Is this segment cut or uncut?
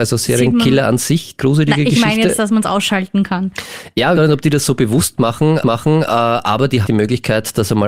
cut